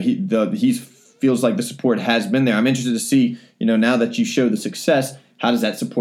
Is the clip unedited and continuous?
yes; 0 cuts

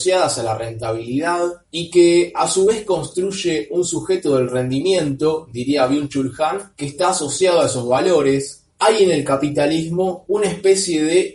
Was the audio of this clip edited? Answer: yes; 3 cuts; at 1.6 s, 6.7 s, 8.7 s

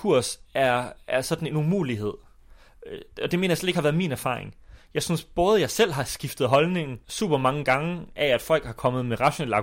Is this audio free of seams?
no; 1 cut; at 7.0 s

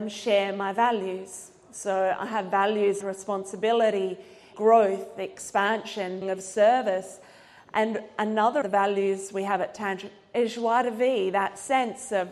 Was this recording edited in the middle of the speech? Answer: yes; 5 cuts; at 3.0 s, 4.5 s, 6.2 s, 8.6 s, 10.3 s

